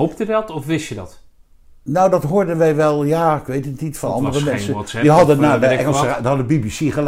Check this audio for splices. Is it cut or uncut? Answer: uncut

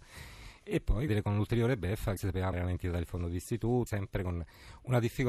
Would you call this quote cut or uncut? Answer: cut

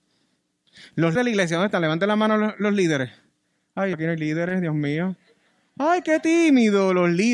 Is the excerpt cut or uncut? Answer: cut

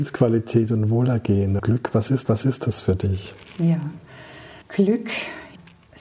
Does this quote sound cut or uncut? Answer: cut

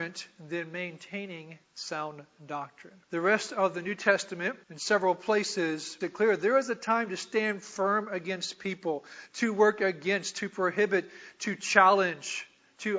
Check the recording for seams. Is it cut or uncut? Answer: cut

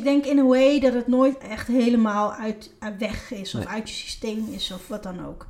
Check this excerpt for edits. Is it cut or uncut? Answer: uncut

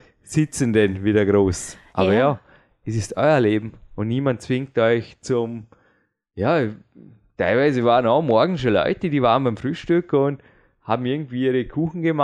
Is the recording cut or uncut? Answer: uncut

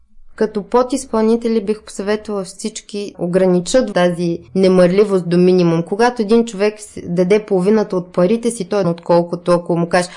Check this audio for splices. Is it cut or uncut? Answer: cut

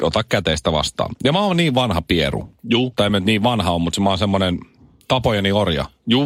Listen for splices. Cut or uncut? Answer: uncut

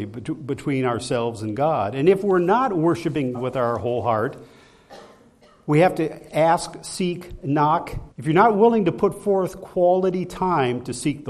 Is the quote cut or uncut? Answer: cut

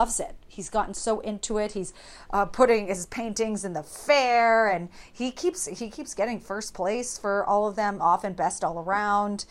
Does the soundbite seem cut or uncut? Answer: uncut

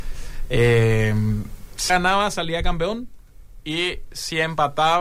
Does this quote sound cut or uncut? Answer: cut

